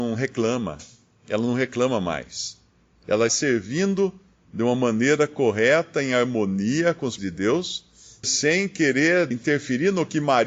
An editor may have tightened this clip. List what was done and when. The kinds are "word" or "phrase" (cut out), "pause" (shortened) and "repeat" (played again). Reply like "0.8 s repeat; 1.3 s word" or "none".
3.3 s word; 7.2 s word; 8.2 s word; 9.3 s word